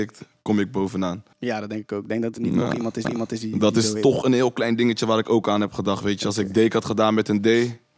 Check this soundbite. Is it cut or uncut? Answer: cut